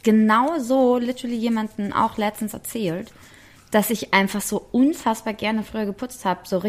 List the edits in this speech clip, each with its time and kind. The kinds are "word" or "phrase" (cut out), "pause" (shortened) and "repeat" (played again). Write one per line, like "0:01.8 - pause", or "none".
none